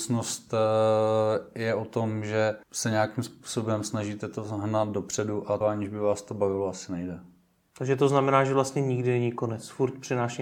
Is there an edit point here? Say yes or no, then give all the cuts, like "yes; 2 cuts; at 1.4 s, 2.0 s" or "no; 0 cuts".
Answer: yes; 2 cuts; at 2.6 s, 5.6 s